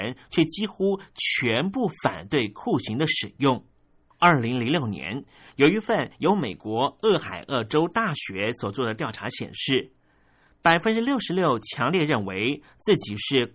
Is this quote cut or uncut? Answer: uncut